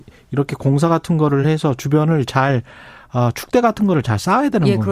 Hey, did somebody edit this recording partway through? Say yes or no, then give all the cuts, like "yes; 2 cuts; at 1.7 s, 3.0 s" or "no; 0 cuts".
no; 0 cuts